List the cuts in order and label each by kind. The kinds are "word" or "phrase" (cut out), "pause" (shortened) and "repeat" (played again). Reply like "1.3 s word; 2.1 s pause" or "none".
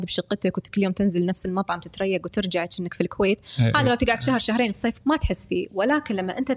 5.0 s word

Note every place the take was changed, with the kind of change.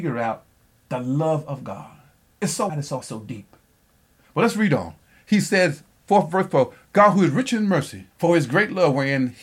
2.7 s word; 3.0 s word; 5.9 s pause; 8.1 s pause

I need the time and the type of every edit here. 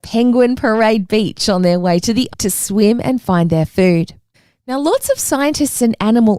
2.3 s word; 4.3 s pause

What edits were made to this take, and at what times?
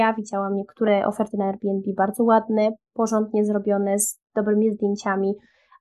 none

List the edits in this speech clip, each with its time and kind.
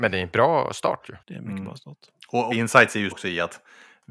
1.2 s pause; 2.5 s word; 3.1 s word

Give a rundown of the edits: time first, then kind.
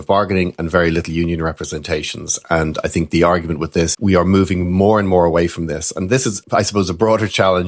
3.9 s word; 6.4 s word

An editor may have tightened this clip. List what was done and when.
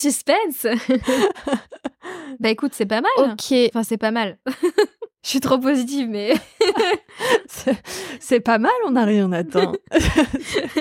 none

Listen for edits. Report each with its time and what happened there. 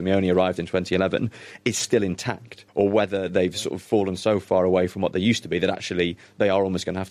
2.7 s pause

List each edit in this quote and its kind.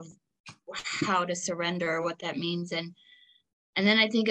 none

